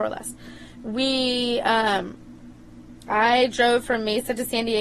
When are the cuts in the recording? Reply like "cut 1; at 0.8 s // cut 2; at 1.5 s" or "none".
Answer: none

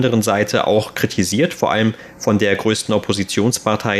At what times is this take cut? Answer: none

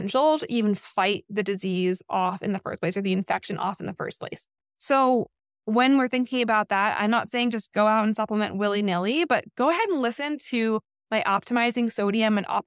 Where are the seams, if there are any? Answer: none

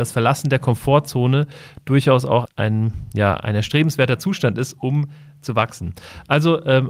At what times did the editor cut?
cut 1; at 2.4 s

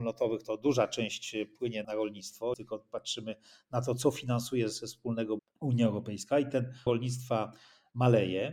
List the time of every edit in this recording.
cut 1; at 1.8 s // cut 2; at 2.5 s // cut 3; at 5.4 s // cut 4; at 6.9 s

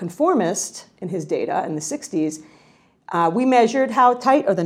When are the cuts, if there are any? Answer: none

